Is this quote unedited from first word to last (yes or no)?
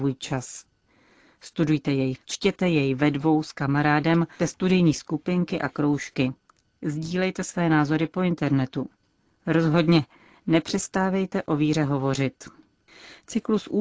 no